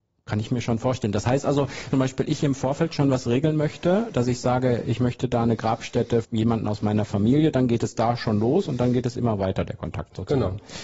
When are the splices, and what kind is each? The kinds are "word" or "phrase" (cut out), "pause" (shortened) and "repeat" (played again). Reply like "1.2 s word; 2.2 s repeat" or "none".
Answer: 1.9 s phrase; 6.2 s word